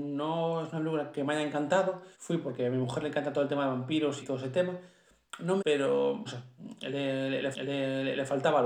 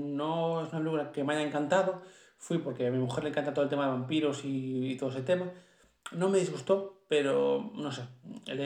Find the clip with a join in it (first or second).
first